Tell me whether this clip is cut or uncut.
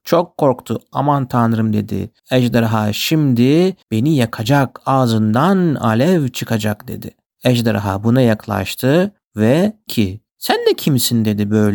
cut